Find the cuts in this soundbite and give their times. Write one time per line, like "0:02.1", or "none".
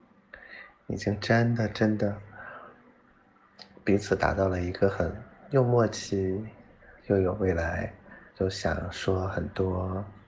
0:07.0
0:08.3